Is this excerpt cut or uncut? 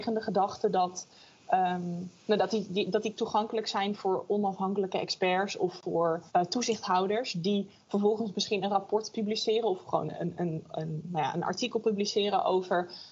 cut